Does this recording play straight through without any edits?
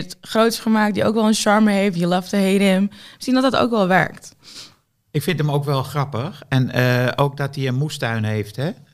yes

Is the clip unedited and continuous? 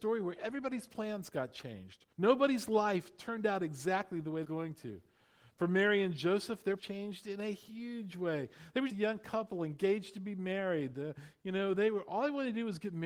no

